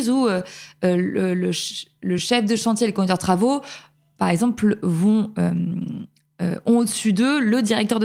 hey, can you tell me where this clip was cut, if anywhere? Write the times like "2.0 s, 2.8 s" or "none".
none